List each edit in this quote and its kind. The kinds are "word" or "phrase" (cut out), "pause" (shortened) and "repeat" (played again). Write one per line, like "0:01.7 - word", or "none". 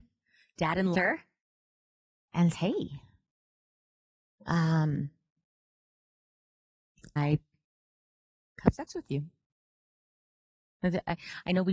0:00.9 - phrase
0:02.5 - word
0:07.2 - word